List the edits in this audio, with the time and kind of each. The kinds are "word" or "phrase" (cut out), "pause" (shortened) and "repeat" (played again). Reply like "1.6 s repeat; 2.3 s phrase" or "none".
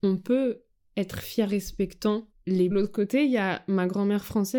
1.5 s phrase; 2.7 s phrase